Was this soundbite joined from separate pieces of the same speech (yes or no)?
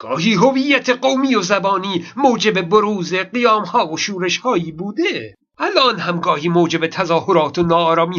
no